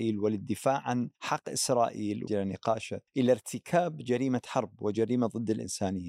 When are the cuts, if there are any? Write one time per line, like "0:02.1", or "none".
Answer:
0:01.1
0:02.3
0:03.1